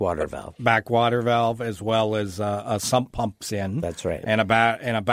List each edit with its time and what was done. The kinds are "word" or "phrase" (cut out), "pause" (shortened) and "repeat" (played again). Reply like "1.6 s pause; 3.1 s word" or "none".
none